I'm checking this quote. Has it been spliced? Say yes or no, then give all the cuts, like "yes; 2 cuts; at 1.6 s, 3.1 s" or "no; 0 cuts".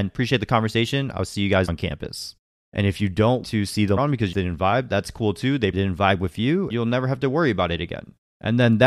yes; 6 cuts; at 1.7 s, 3.4 s, 4.0 s, 4.3 s, 5.7 s, 6.7 s